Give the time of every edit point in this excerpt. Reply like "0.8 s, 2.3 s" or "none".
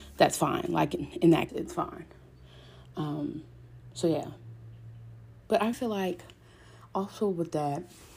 1.5 s, 5.7 s